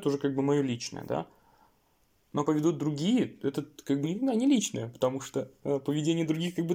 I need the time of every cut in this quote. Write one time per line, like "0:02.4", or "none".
0:02.4
0:04.0